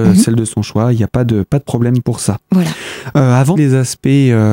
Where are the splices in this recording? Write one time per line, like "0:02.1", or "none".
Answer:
0:03.6

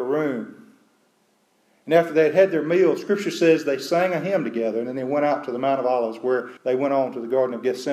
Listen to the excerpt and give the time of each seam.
0:06.6

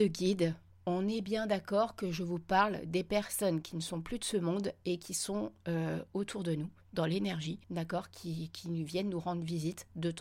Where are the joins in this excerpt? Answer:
0:07.6

